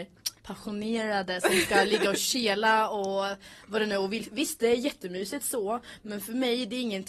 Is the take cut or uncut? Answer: uncut